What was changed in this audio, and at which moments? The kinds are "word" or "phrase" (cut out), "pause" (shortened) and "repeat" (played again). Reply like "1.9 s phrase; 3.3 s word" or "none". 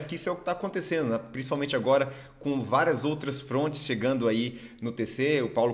none